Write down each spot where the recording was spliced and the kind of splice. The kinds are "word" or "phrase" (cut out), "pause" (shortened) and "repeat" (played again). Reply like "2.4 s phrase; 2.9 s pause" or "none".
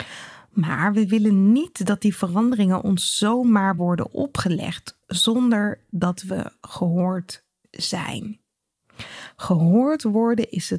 none